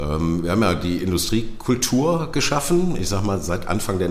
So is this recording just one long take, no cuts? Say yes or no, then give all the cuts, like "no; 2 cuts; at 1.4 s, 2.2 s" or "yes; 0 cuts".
yes; 0 cuts